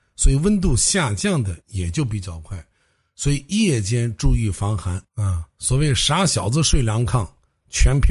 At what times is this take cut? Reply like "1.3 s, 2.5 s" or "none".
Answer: 1.6 s, 5.1 s